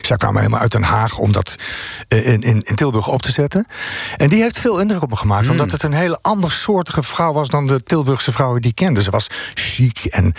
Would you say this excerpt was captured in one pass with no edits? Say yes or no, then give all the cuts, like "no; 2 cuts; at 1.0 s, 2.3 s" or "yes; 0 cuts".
yes; 0 cuts